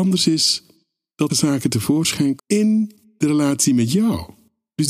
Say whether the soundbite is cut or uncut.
cut